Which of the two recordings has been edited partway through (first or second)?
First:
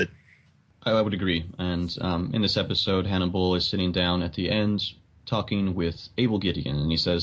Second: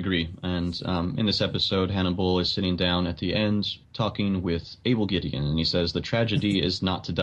second